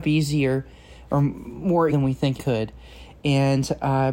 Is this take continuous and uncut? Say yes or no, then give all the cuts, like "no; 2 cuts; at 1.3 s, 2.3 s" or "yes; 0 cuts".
no; 2 cuts; at 1.9 s, 2.4 s